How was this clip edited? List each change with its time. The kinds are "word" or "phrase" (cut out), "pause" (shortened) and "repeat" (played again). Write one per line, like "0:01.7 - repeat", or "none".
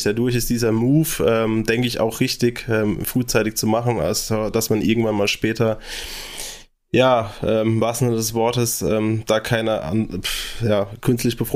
none